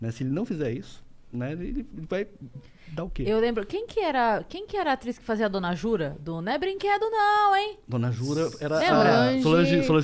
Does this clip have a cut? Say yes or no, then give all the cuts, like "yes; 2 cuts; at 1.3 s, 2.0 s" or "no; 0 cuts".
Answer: no; 0 cuts